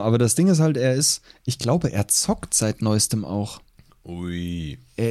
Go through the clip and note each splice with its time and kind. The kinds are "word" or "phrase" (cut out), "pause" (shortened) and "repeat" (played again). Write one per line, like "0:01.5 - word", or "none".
none